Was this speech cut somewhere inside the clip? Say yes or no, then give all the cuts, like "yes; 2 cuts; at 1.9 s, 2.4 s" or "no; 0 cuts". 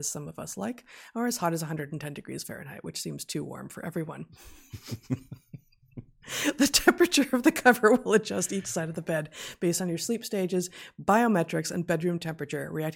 no; 0 cuts